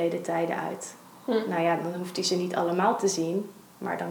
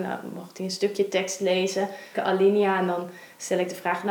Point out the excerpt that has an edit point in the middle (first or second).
second